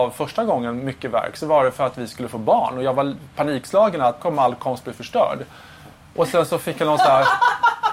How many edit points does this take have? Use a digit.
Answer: 1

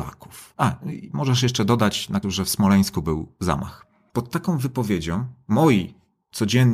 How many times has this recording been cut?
1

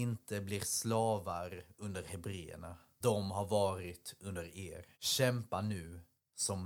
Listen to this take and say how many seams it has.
2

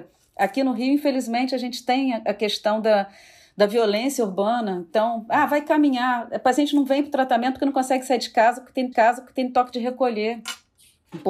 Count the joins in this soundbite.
1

